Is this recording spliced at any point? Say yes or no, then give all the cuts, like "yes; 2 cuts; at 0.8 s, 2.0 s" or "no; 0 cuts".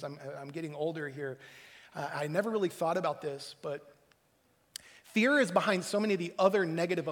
no; 0 cuts